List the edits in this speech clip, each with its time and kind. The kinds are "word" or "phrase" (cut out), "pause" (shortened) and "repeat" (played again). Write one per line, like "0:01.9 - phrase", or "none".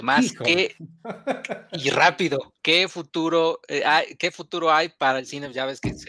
0:02.6 - pause